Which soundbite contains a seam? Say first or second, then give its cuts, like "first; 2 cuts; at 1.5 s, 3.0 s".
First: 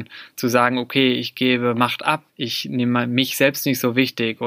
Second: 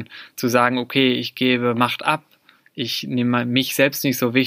first; 1 cut; at 2.3 s